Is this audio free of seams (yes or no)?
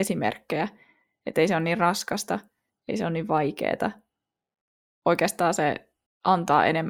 yes